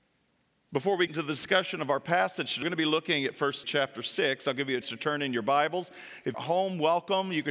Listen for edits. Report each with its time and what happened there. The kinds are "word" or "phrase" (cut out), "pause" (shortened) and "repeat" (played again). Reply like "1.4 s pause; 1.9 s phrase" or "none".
1.1 s word; 2.6 s word; 3.6 s word; 4.8 s word; 6.3 s word